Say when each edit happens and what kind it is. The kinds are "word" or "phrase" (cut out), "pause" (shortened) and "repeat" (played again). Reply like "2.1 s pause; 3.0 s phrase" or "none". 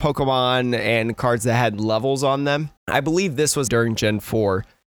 2.8 s pause; 3.7 s word